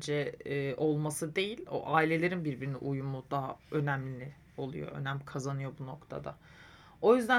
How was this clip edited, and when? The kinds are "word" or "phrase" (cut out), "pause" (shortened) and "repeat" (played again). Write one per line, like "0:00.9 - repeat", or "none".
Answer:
0:03.6 - pause

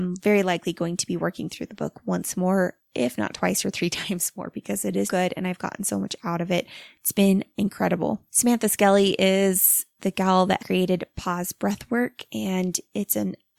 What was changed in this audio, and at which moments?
0:05.1 - word
0:10.6 - word

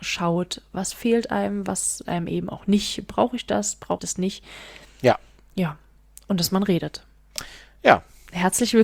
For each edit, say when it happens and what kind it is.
0:02.0 - word
0:04.0 - word

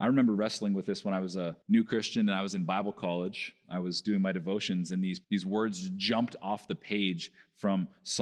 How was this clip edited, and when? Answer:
0:01.6 - pause
0:05.2 - pause

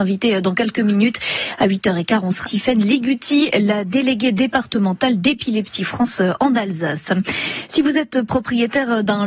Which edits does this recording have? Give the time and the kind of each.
0:02.4 - word

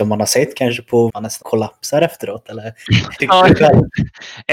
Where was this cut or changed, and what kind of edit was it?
0:01.1 - phrase
0:01.4 - word
0:03.2 - phrase

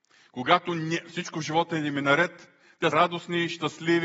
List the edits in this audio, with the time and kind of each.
0:02.9 - word

